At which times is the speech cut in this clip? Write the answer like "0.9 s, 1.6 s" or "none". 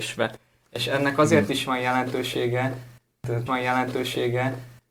3.5 s